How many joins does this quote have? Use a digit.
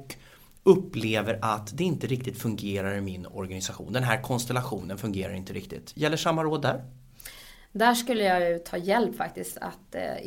0